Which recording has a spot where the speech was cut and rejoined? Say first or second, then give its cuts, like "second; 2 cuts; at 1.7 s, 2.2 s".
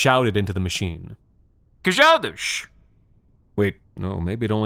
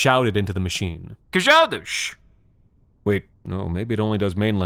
second; 1 cut; at 1.2 s